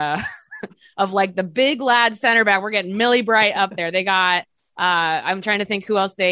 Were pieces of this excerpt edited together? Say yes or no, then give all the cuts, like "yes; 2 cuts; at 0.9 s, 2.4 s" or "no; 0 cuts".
no; 0 cuts